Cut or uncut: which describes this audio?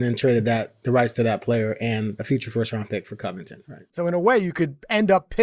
cut